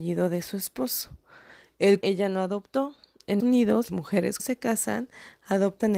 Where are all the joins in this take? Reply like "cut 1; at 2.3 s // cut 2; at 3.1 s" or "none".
cut 1; at 2.0 s // cut 2; at 3.4 s // cut 3; at 3.9 s // cut 4; at 4.4 s